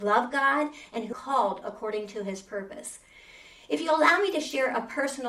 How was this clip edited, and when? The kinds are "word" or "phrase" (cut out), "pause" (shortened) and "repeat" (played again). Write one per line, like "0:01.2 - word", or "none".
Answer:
0:01.1 - word